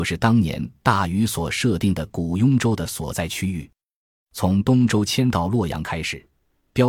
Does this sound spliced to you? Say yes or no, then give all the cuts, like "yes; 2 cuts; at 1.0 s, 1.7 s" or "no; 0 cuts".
no; 0 cuts